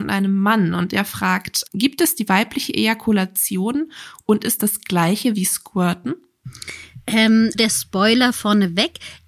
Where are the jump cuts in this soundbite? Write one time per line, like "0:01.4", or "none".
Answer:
0:01.7
0:04.6
0:07.5